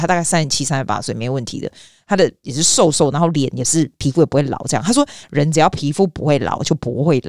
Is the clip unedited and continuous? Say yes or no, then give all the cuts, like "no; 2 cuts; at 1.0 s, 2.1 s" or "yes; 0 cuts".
yes; 0 cuts